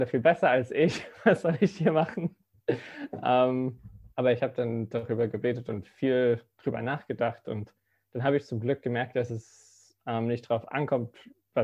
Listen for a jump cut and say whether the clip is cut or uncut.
cut